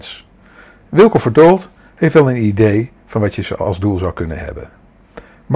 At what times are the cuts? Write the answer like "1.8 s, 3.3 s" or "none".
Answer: none